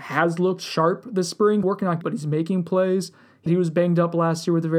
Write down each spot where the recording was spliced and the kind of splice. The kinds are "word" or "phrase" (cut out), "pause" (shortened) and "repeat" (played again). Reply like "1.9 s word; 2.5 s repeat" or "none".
1.6 s word; 2.0 s word; 3.5 s word